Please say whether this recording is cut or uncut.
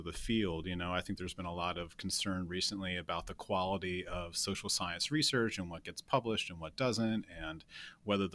uncut